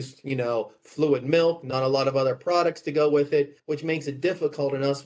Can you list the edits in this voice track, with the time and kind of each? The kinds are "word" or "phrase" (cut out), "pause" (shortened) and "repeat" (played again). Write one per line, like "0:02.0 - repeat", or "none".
0:03.6 - pause